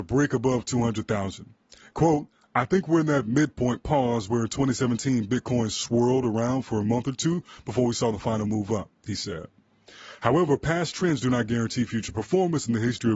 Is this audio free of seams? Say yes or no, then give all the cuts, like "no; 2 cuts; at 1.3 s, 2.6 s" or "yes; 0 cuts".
yes; 0 cuts